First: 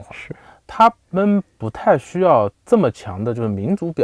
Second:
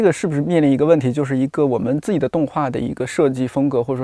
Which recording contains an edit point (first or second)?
first